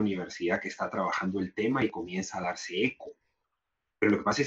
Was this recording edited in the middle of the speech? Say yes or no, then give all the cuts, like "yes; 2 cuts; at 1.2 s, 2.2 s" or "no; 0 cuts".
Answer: no; 0 cuts